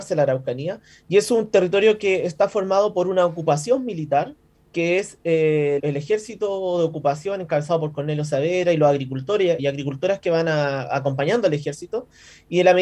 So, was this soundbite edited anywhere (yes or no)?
yes